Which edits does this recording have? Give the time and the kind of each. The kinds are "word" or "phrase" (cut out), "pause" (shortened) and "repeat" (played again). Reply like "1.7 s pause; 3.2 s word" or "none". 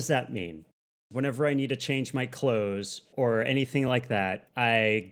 none

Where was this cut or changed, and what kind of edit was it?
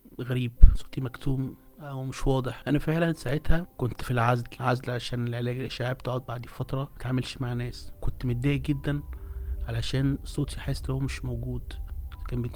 none

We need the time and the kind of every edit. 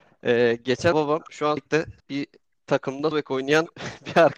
0.9 s word; 1.6 s word; 2.0 s pause; 3.1 s word

